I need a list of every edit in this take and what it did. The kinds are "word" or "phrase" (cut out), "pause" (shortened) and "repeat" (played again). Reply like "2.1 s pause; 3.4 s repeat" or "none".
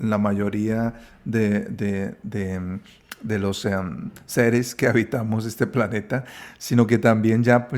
none